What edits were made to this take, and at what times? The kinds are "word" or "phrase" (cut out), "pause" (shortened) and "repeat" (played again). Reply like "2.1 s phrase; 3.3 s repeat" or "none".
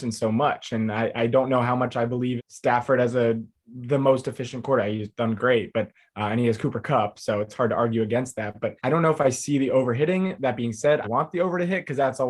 2.4 s word; 8.8 s pause; 11.0 s word